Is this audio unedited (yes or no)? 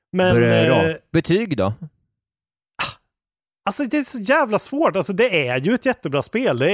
yes